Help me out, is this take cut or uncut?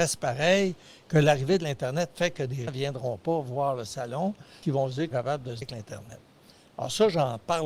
cut